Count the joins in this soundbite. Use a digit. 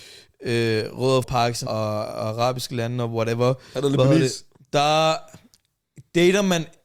2